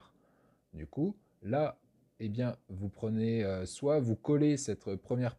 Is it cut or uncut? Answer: uncut